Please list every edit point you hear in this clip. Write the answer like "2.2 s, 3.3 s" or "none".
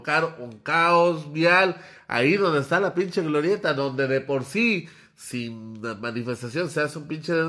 none